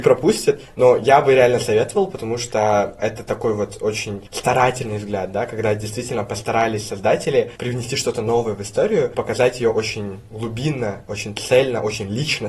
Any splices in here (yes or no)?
no